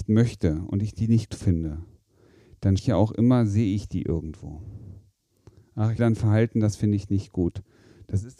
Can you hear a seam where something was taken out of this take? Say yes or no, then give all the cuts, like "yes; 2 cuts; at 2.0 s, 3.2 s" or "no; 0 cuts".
yes; 3 cuts; at 1.3 s, 2.8 s, 6.0 s